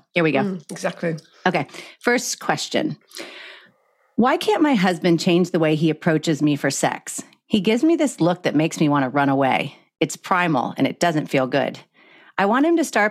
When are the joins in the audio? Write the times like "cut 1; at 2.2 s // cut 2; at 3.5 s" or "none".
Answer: none